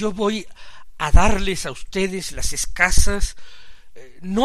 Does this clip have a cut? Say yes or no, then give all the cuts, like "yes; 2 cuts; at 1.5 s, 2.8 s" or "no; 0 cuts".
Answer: no; 0 cuts